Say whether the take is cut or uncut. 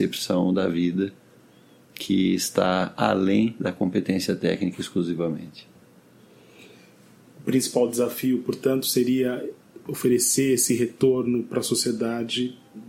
uncut